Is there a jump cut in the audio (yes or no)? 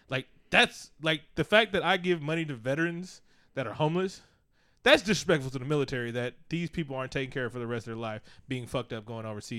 no